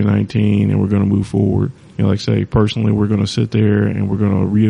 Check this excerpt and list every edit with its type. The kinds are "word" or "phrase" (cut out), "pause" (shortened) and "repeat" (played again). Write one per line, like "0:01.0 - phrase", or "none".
0:01.8 - pause